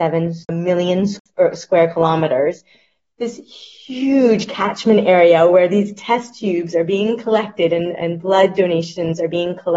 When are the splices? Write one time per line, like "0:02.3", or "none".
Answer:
none